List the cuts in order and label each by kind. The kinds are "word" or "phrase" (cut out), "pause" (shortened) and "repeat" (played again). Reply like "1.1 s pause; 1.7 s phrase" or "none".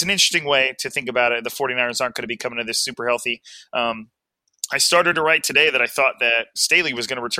none